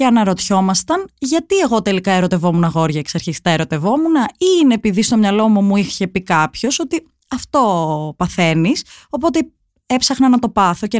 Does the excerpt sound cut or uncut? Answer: uncut